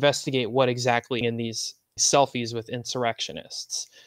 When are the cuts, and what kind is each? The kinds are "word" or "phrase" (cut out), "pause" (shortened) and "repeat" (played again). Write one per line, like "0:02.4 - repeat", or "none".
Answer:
0:01.2 - phrase
0:02.0 - phrase